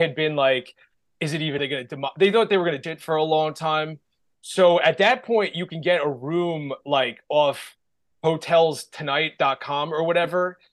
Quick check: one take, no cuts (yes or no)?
no